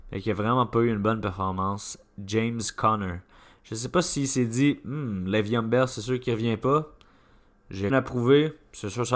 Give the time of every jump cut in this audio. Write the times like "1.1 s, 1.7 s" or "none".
7.9 s